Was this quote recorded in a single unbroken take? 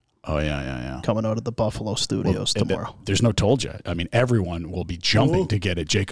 yes; 0 cuts

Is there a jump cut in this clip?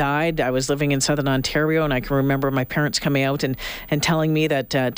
no; 0 cuts

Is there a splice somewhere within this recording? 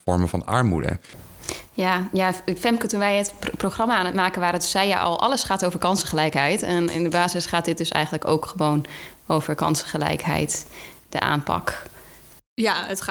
no; 0 cuts

